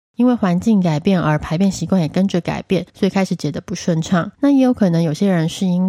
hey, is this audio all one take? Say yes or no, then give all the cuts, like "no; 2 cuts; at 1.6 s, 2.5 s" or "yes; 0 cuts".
no; 2 cuts; at 2.9 s, 4.3 s